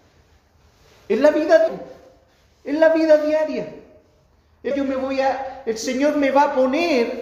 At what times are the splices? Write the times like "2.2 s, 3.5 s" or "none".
1.7 s, 4.7 s